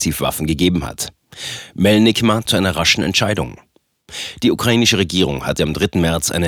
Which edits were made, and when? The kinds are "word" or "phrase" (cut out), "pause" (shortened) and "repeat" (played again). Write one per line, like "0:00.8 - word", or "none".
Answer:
0:02.5 - phrase